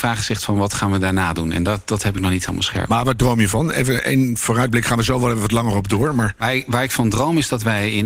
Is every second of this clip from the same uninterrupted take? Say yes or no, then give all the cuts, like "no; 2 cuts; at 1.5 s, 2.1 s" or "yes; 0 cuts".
yes; 0 cuts